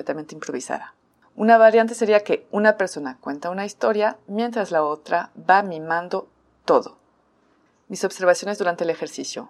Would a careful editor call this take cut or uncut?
uncut